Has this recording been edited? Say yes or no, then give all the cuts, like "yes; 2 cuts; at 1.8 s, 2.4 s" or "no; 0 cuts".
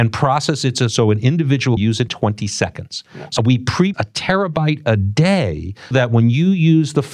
yes; 5 cuts; at 1.8 s, 2.1 s, 3.4 s, 3.9 s, 5.9 s